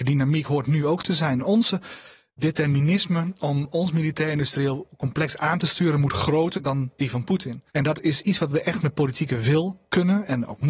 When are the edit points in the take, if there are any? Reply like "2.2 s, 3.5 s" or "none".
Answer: 6.6 s, 7.7 s